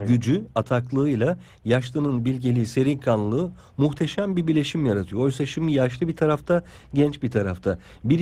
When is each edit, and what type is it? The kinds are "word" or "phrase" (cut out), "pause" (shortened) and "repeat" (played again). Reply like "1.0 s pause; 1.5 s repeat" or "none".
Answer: none